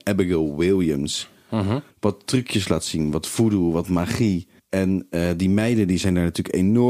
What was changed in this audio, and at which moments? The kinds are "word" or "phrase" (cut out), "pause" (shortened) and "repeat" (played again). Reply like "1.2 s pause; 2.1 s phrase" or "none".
1.9 s pause; 4.6 s pause